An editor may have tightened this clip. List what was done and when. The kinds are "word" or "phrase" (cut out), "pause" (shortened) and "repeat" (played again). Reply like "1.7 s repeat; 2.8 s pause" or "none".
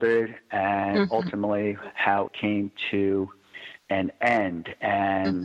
2.3 s word; 3.8 s pause